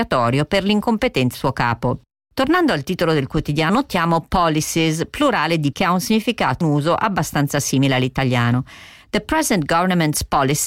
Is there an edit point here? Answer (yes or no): yes